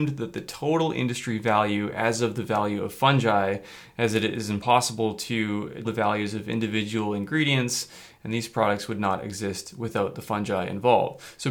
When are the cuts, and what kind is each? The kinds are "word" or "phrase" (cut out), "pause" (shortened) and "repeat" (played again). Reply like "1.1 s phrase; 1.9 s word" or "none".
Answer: 5.8 s word

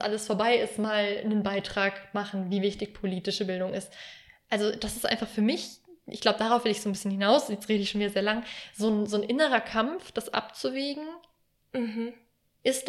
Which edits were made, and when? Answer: none

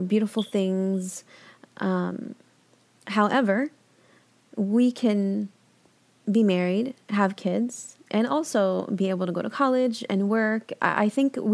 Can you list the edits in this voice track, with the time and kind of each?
none

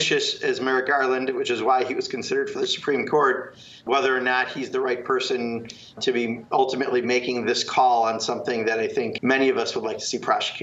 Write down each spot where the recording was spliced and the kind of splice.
9.2 s word

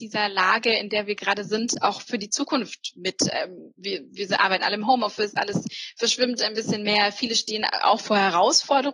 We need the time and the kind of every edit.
none

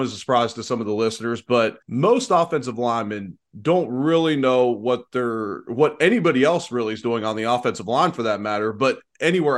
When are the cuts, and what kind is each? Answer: 1.8 s pause

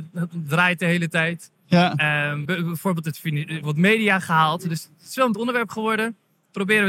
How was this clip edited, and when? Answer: 2.4 s phrase; 3.6 s phrase; 5.3 s word

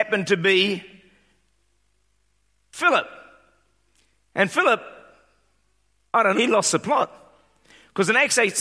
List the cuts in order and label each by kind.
6.3 s word

